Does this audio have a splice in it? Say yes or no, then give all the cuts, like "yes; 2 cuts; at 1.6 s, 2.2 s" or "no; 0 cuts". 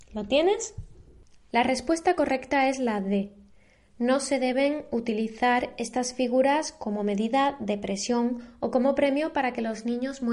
no; 0 cuts